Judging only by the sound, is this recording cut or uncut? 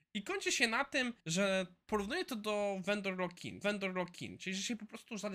cut